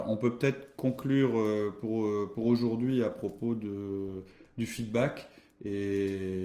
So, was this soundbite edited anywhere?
no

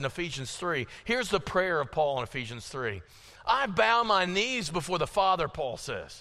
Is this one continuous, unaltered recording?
yes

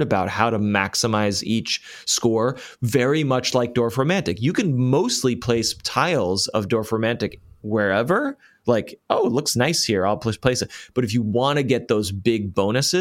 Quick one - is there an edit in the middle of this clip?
no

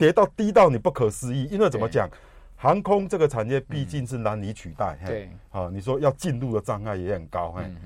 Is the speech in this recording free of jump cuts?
yes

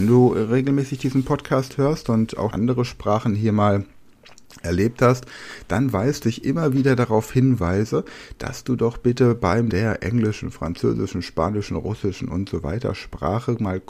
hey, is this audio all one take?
no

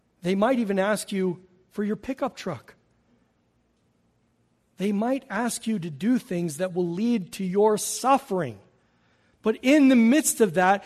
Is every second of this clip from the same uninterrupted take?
yes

